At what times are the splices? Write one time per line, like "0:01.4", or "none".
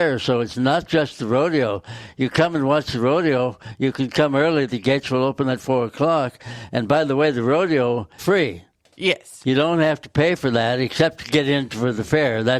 0:08.2